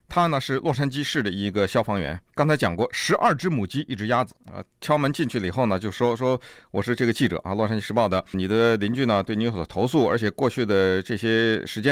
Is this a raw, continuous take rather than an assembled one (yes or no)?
no